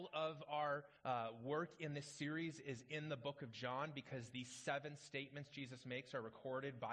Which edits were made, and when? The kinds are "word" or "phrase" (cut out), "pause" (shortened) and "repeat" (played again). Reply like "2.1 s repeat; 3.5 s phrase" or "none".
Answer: 1.0 s pause